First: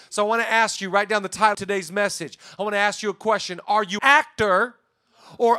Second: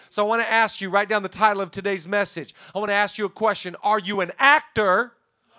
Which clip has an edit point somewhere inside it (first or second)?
first